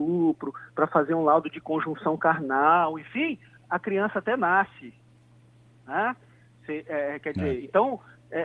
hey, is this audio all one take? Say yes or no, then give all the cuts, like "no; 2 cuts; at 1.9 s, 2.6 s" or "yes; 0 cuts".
yes; 0 cuts